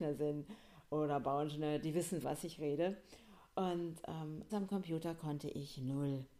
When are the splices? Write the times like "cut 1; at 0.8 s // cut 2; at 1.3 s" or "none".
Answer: cut 1; at 2.2 s // cut 2; at 4.5 s